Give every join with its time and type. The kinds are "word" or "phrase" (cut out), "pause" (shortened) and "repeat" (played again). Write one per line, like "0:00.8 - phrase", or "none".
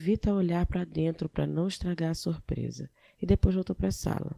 none